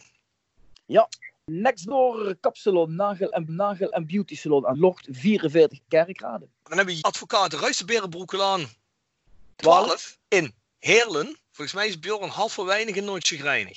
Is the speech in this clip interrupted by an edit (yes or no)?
yes